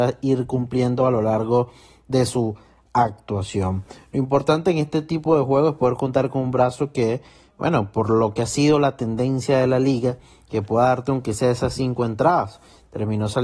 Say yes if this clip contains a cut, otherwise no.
no